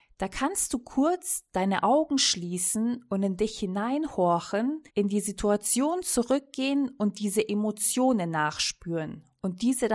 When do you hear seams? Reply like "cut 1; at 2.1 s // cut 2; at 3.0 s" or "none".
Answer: cut 1; at 4.9 s

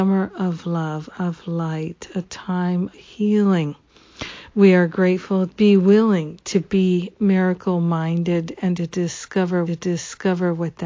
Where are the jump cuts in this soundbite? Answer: cut 1; at 1.1 s // cut 2; at 2.9 s // cut 3; at 5.5 s // cut 4; at 9.7 s

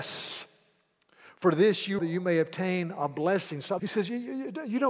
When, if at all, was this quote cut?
cut 1; at 2.0 s // cut 2; at 3.8 s

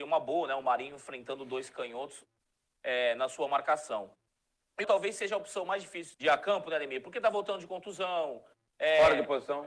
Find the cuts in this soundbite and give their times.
cut 1; at 4.8 s // cut 2; at 6.1 s

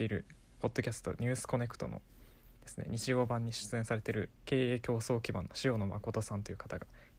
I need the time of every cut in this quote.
cut 1; at 4.3 s

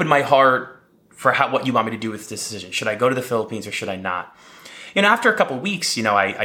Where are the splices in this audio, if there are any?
none

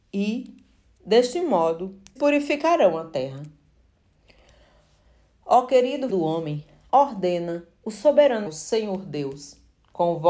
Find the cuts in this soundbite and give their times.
cut 1; at 2.2 s // cut 2; at 6.1 s // cut 3; at 6.9 s // cut 4; at 8.5 s

